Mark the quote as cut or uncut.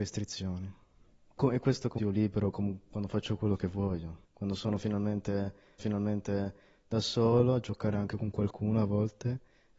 cut